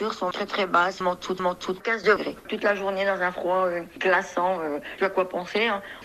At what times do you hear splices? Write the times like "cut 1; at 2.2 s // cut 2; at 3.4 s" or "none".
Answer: cut 1; at 1.4 s // cut 2; at 5.0 s

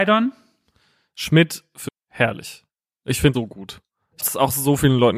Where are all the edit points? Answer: cut 1; at 1.9 s // cut 2; at 3.3 s // cut 3; at 4.2 s

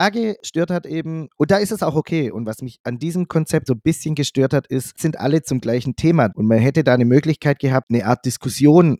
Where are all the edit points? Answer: cut 1; at 3.7 s // cut 2; at 5.0 s // cut 3; at 6.3 s

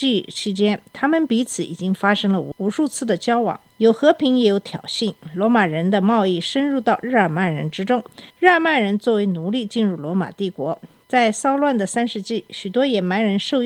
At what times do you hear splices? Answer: cut 1; at 3.7 s // cut 2; at 8.3 s

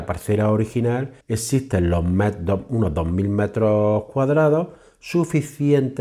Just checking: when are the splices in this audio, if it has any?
cut 1; at 1.2 s

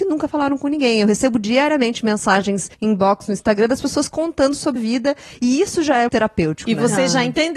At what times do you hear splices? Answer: cut 1; at 2.7 s // cut 2; at 4.8 s // cut 3; at 6.1 s

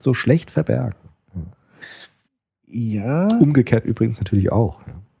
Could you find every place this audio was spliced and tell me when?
cut 1; at 2.3 s

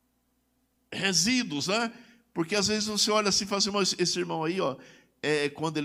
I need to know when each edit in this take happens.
none

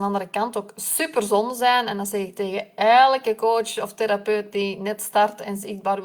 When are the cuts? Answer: none

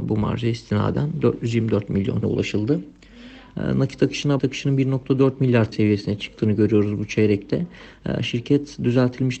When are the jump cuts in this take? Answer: cut 1; at 2.2 s // cut 2; at 4.4 s // cut 3; at 5.7 s

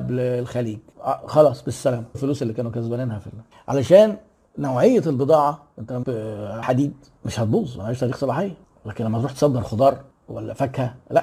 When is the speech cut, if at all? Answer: cut 1; at 2.1 s // cut 2; at 6.0 s // cut 3; at 6.6 s

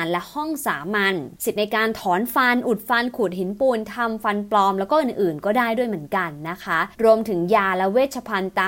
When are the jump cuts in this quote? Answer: cut 1; at 1.3 s // cut 2; at 6.9 s

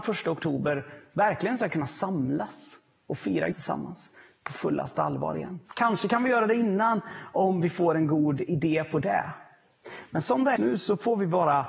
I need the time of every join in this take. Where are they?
cut 1; at 3.5 s // cut 2; at 5.7 s // cut 3; at 10.6 s

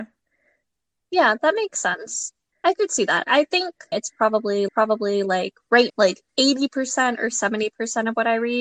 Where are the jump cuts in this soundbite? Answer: cut 1; at 2.5 s // cut 2; at 3.9 s // cut 3; at 4.7 s // cut 4; at 5.9 s // cut 5; at 6.3 s

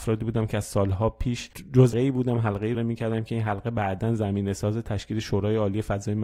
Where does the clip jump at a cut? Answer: cut 1; at 1.9 s // cut 2; at 2.7 s

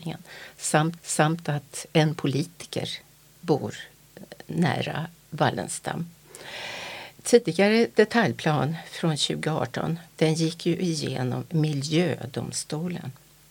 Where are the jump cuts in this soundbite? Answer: cut 1; at 1.0 s // cut 2; at 3.4 s // cut 3; at 7.2 s

